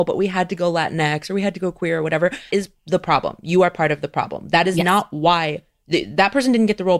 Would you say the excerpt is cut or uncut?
cut